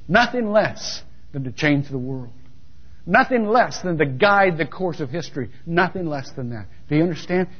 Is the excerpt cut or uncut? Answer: uncut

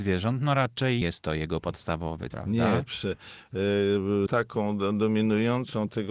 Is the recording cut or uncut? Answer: cut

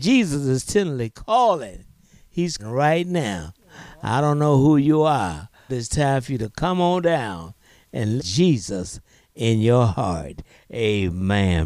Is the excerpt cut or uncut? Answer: cut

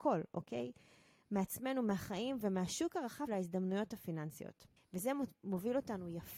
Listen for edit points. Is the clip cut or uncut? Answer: cut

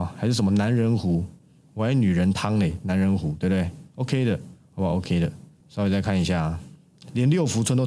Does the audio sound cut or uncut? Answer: uncut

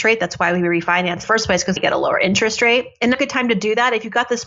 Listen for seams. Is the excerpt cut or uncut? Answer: cut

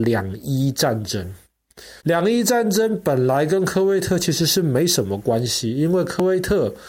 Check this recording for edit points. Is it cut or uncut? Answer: cut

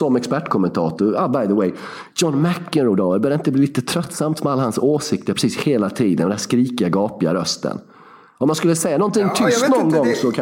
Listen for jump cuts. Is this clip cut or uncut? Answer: uncut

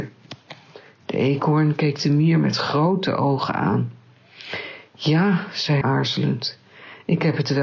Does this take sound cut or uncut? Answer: cut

